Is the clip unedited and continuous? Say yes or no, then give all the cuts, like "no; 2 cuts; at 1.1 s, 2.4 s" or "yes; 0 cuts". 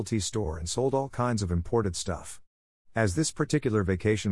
yes; 0 cuts